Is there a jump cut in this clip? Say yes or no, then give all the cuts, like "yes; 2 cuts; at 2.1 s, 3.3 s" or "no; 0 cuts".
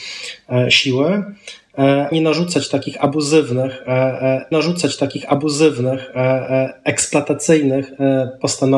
yes; 2 cuts; at 2.1 s, 4.5 s